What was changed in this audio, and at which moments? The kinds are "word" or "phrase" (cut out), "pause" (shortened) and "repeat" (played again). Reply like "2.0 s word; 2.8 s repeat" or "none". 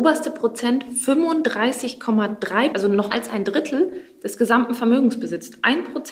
2.7 s word; 3.1 s word